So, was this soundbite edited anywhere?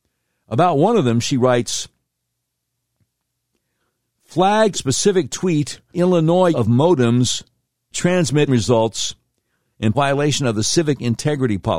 yes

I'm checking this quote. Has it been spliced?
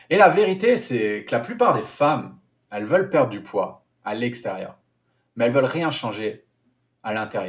no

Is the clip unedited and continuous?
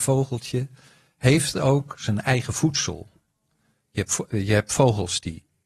yes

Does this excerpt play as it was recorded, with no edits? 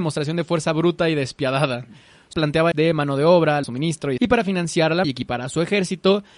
no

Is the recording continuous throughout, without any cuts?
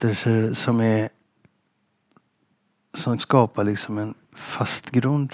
no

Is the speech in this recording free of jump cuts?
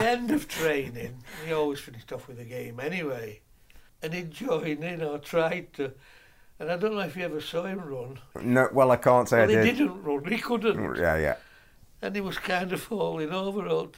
no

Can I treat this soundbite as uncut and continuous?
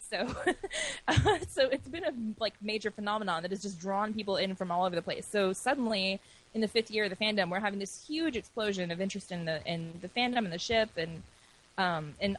yes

